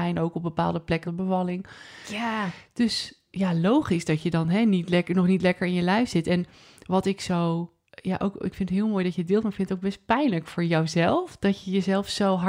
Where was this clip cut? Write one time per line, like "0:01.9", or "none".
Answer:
0:01.0
0:07.9